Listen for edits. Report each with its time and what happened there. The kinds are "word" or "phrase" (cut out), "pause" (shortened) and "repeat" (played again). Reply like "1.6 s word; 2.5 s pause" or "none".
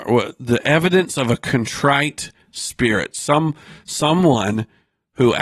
none